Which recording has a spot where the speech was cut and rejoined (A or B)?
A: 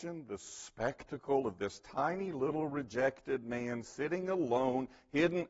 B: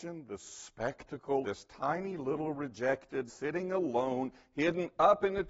B